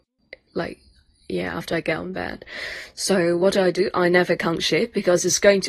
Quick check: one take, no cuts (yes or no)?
yes